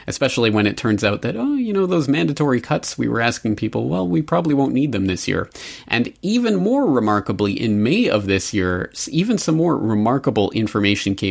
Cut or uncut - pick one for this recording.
uncut